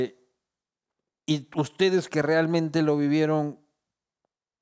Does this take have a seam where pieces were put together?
no; 0 cuts

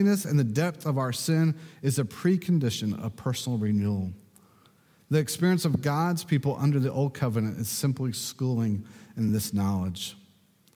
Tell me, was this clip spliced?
no; 0 cuts

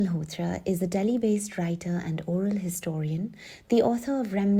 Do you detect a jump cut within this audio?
no; 0 cuts

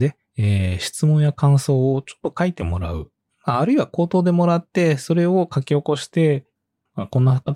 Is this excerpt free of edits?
yes; 0 cuts

